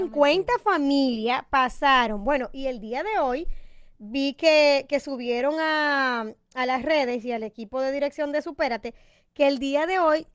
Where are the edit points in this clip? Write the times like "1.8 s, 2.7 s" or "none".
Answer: none